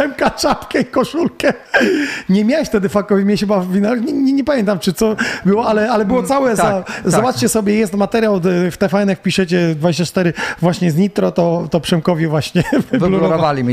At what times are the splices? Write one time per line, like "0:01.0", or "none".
none